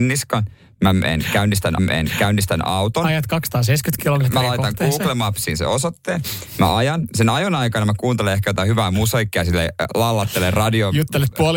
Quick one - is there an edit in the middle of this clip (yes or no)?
yes